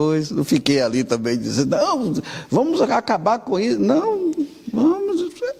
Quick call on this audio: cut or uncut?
uncut